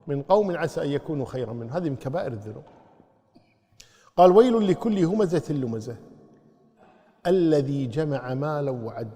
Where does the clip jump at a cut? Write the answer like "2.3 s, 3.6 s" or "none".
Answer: none